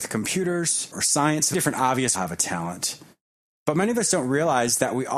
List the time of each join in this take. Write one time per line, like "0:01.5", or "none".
0:01.5
0:02.1